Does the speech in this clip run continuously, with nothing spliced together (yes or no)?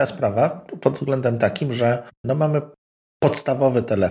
no